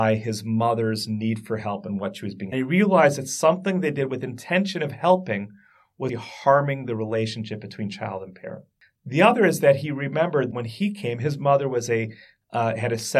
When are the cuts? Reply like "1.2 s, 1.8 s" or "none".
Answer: 2.5 s, 6.1 s, 10.5 s